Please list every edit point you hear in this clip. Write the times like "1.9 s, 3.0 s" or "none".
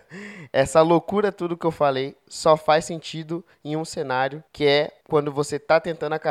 4.5 s, 5.0 s

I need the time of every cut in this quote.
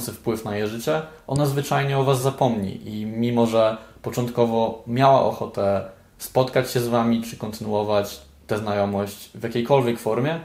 none

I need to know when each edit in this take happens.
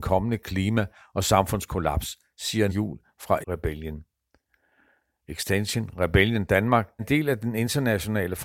2.7 s, 3.4 s, 7.0 s

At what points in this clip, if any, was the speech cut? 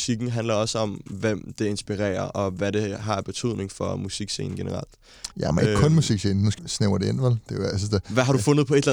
5.3 s, 6.6 s

